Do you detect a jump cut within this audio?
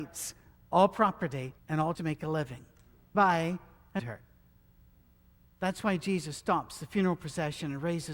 yes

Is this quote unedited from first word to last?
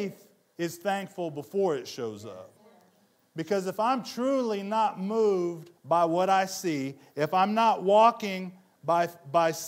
no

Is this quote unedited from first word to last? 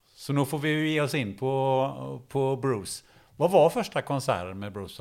yes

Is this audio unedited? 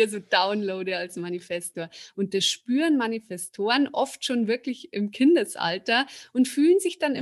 yes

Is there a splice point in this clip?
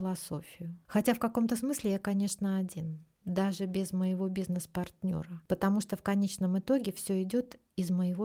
no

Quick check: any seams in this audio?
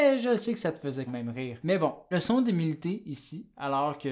yes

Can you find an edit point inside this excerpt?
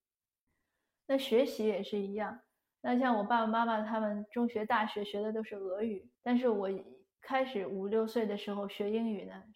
yes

